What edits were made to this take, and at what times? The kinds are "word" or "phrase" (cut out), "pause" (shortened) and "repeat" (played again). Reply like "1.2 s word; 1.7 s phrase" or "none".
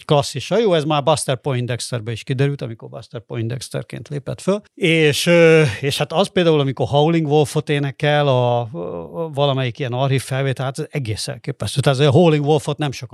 4.7 s pause